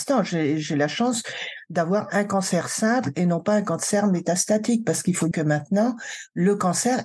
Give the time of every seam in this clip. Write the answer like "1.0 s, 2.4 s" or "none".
5.3 s